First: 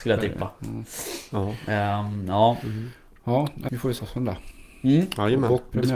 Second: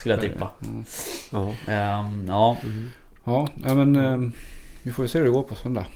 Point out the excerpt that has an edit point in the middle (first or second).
first